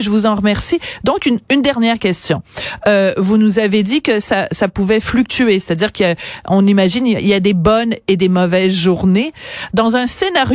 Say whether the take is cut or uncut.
uncut